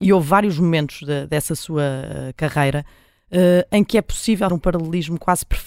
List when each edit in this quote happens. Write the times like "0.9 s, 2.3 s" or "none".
4.5 s